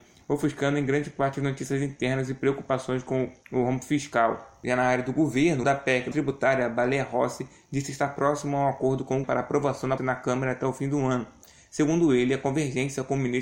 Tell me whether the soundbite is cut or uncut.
cut